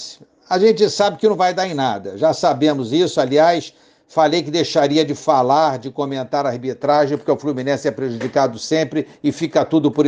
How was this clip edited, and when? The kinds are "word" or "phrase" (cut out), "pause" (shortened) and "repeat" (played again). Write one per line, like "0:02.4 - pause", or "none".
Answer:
none